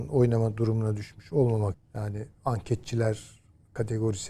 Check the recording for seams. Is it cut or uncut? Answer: cut